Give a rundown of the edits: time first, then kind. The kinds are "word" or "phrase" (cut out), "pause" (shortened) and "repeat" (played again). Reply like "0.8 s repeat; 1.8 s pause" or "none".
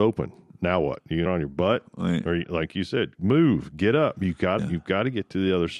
1.3 s phrase; 4.6 s phrase